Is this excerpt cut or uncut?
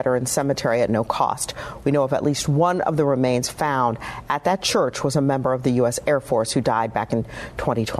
uncut